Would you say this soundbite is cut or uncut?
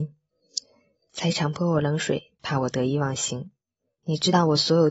uncut